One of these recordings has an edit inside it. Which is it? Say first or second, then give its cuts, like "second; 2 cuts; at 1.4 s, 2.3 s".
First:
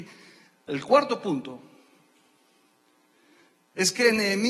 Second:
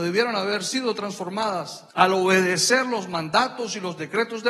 second; 1 cut; at 1.9 s